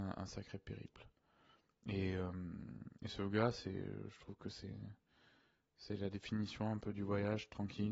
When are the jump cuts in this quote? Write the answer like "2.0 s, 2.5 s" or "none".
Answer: none